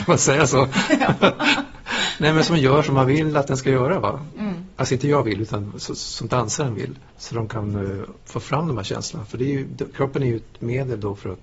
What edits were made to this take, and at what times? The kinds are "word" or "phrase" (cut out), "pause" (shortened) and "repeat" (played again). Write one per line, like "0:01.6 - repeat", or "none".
0:08.2 - pause